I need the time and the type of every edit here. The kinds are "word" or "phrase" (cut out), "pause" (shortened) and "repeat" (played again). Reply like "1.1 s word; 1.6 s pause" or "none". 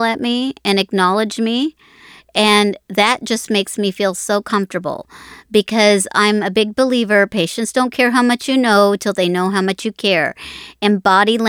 none

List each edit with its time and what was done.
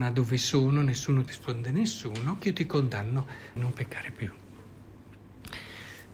1.3 s phrase; 2.4 s phrase; 3.6 s phrase

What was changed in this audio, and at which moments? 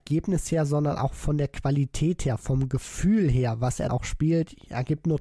3.9 s word

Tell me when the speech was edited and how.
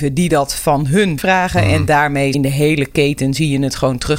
1.2 s word; 2.3 s phrase

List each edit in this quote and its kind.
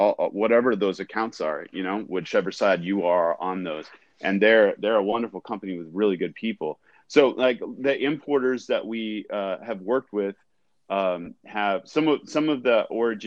none

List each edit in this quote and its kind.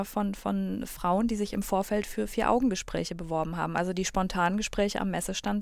none

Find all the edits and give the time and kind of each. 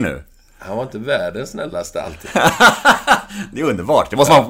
none

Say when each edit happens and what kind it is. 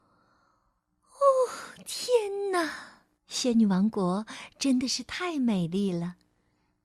3.2 s pause

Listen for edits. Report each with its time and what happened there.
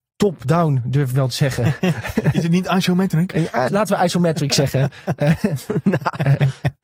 3.7 s word

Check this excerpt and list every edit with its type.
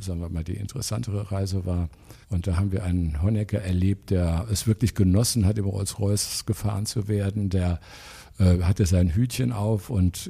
2.2 s pause

